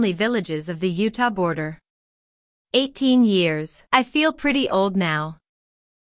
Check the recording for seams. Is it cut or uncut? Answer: cut